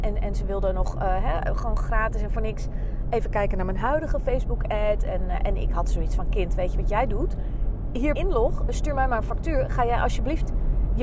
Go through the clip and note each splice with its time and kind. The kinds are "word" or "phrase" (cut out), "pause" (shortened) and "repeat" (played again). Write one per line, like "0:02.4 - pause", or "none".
0:08.2 - phrase
0:08.7 - word